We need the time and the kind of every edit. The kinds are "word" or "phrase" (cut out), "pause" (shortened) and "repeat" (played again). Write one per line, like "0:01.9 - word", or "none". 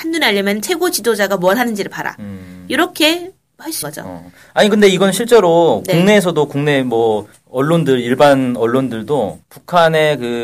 0:03.8 - word
0:07.3 - pause
0:09.4 - pause